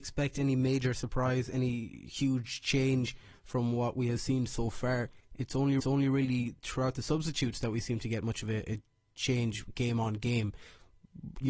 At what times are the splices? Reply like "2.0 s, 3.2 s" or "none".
5.8 s